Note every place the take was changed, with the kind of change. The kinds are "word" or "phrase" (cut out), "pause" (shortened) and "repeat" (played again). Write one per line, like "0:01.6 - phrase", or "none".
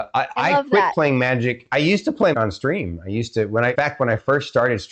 0:02.3 - word
0:03.7 - word